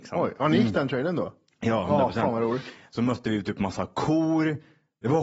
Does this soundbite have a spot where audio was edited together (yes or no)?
no